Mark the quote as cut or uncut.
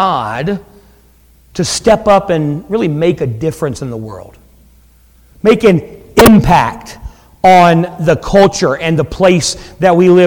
uncut